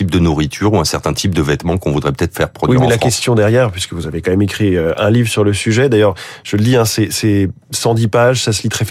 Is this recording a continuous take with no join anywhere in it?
yes; 0 cuts

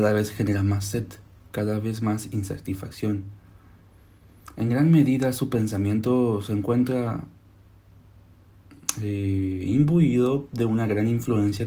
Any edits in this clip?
no; 0 cuts

